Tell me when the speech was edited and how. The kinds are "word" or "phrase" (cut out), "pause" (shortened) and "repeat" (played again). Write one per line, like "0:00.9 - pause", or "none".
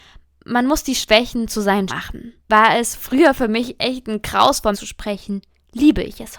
0:01.9 - word
0:02.4 - pause
0:04.7 - word